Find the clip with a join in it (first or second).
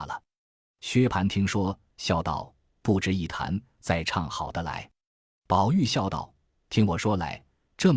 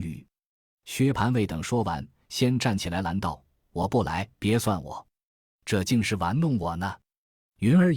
second